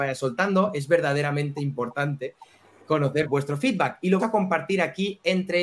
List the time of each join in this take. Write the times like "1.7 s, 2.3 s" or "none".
3.3 s, 4.2 s